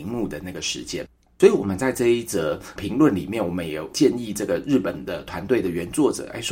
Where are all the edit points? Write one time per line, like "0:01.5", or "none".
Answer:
none